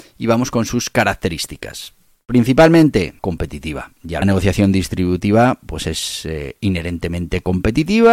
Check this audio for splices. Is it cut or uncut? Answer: cut